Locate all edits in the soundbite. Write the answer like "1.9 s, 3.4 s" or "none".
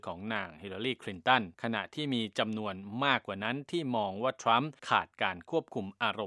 1.5 s, 4.8 s